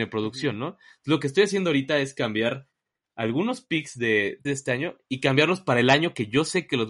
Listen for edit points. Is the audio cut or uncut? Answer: cut